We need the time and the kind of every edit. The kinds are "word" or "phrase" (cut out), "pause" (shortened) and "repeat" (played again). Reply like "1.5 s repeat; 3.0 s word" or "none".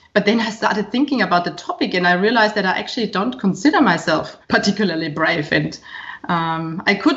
4.4 s pause